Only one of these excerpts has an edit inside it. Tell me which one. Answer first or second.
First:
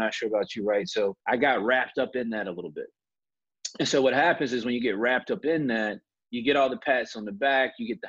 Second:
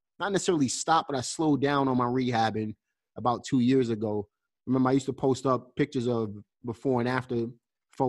first